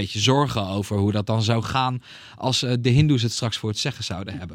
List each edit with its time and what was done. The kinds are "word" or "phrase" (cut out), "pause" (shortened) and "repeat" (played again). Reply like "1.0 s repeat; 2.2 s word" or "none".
none